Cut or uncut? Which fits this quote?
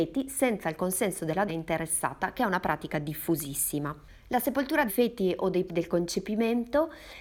cut